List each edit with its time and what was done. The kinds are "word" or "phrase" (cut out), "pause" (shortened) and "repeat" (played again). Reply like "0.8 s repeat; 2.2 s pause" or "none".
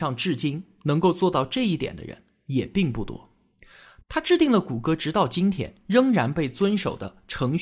none